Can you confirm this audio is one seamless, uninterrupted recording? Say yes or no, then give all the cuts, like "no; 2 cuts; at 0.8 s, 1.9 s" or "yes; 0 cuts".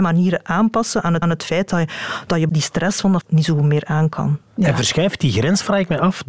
no; 3 cuts; at 1.2 s, 2.5 s, 3.2 s